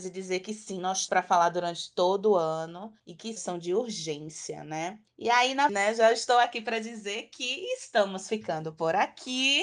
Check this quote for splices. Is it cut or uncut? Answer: cut